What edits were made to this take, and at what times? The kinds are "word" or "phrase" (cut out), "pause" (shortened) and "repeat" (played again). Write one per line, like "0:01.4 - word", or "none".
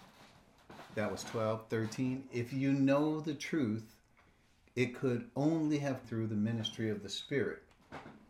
0:06.0 - word